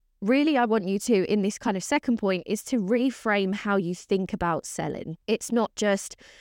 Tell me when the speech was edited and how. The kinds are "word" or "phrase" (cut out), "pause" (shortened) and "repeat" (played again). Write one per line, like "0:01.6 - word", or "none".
0:05.2 - pause